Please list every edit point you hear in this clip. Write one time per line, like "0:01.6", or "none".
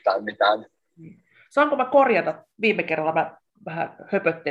none